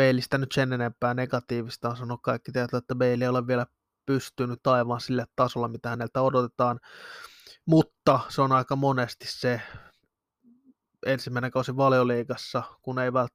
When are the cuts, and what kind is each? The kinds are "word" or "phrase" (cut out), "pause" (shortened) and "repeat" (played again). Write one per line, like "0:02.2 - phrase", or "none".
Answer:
none